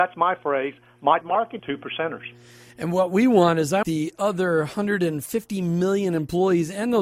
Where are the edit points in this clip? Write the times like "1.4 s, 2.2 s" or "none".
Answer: 1.2 s, 1.6 s, 3.8 s

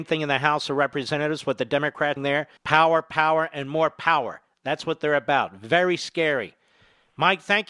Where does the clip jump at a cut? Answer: 2.2 s, 2.6 s

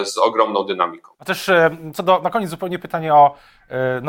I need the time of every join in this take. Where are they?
1.1 s

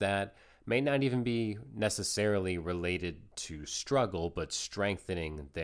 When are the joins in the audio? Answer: none

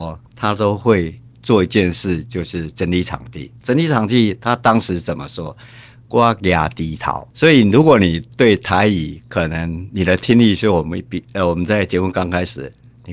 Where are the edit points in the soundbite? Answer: 7.3 s

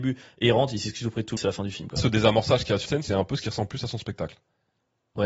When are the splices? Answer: 1.4 s, 2.0 s, 2.9 s

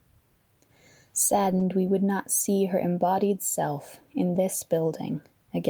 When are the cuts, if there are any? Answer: none

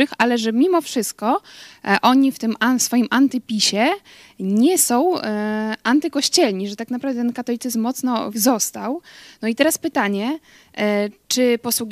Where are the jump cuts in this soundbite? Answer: 8.3 s

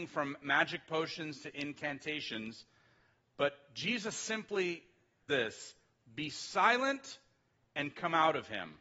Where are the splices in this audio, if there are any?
5.3 s

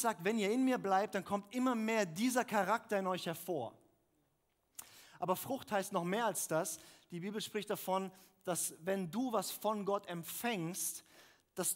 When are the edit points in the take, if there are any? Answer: none

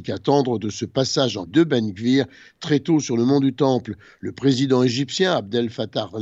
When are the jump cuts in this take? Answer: 1.5 s

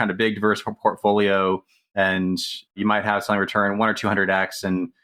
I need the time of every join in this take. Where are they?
2.7 s

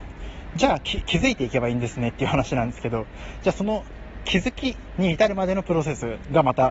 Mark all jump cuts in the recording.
none

